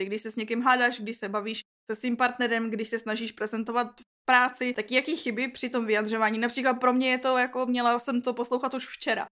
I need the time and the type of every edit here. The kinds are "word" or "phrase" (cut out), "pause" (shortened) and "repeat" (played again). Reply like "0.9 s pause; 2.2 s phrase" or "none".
none